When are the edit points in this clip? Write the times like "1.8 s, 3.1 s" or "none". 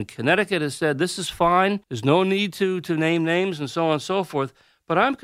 1.8 s